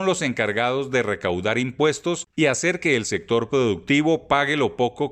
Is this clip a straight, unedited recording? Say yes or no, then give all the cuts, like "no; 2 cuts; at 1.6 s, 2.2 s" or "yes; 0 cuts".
yes; 0 cuts